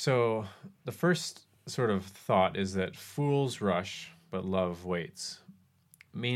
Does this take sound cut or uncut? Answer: uncut